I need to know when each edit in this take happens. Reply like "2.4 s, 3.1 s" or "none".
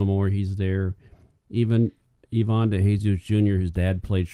none